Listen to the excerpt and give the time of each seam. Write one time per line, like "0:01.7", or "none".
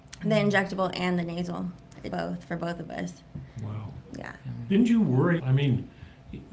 0:02.1
0:05.4